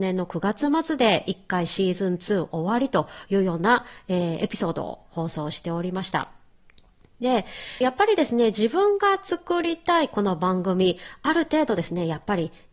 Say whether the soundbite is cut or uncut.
cut